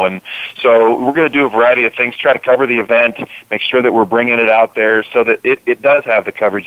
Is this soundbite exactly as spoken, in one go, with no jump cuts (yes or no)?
yes